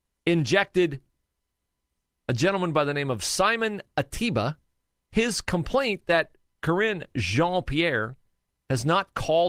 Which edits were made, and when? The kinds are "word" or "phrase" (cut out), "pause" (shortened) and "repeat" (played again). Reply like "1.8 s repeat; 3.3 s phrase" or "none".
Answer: none